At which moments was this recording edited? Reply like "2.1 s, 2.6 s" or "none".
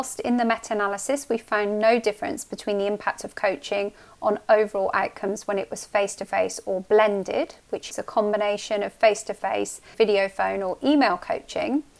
7.9 s, 9.9 s